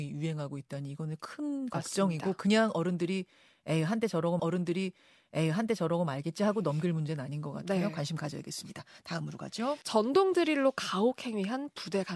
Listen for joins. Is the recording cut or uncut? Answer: cut